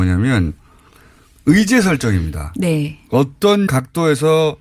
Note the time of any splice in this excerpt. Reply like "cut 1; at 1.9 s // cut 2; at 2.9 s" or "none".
cut 1; at 3.7 s